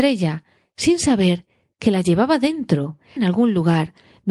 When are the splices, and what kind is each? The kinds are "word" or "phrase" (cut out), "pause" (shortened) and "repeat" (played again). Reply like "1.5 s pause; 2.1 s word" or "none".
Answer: 3.2 s word